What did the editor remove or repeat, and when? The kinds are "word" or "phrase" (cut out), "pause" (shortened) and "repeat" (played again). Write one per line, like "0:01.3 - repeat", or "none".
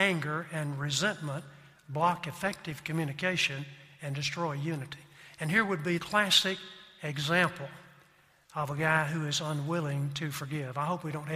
0:06.0 - word